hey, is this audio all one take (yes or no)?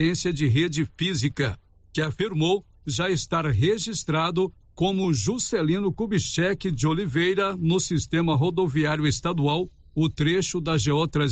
yes